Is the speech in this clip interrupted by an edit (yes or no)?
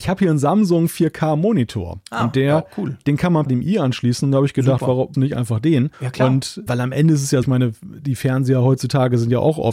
yes